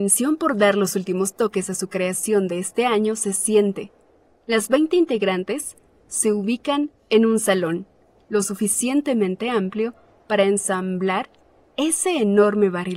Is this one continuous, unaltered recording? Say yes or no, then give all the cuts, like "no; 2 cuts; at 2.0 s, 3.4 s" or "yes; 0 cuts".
yes; 0 cuts